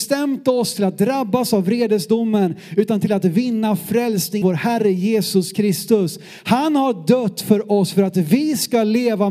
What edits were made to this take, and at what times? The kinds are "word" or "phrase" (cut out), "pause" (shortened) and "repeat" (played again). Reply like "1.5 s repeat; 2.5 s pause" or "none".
4.4 s word